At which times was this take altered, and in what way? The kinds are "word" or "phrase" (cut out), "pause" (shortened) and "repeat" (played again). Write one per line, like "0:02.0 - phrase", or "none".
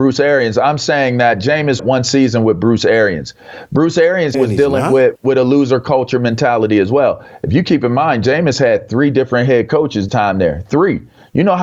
0:01.8 - phrase
0:04.3 - word
0:05.2 - word
0:10.1 - phrase